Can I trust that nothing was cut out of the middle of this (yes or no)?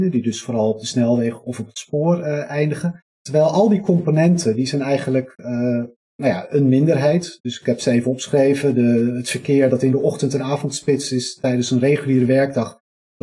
no